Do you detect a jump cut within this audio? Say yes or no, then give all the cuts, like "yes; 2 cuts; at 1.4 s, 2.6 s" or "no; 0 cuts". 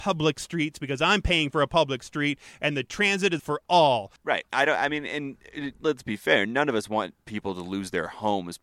yes; 2 cuts; at 3.4 s, 4.2 s